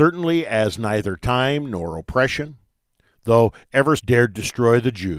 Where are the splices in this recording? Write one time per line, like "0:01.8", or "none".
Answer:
0:04.0